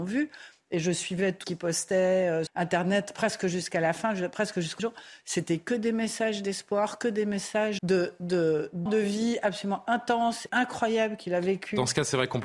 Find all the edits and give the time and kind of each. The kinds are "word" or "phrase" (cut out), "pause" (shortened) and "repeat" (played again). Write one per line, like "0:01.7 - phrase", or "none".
0:01.4 - word
0:02.5 - word
0:04.8 - word
0:07.8 - word
0:08.9 - word
0:10.5 - word